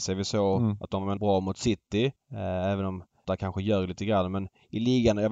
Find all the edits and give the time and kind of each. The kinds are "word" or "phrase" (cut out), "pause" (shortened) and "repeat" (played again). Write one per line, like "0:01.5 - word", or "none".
0:01.2 - word
0:02.2 - pause
0:03.2 - word